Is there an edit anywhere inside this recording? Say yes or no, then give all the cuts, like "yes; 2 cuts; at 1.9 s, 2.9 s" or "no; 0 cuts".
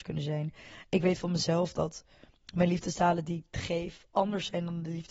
no; 0 cuts